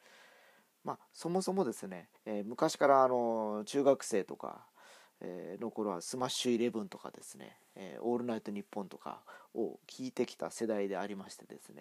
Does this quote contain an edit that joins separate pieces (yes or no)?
yes